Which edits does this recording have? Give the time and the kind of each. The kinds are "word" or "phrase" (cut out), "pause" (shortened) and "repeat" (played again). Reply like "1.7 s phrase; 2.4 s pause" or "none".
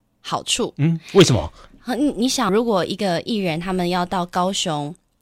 2.5 s word